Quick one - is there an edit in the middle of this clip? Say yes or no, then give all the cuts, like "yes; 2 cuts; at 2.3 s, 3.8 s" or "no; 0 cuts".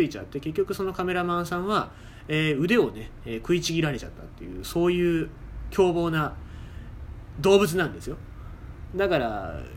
yes; 1 cut; at 6.9 s